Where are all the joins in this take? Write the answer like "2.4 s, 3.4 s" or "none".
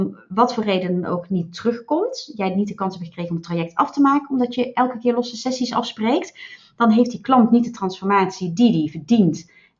none